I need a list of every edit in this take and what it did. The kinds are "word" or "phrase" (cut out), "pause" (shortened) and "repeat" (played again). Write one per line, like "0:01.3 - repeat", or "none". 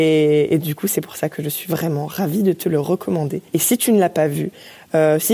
0:03.5 - pause